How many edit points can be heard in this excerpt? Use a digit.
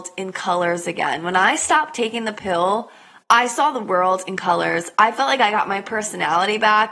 0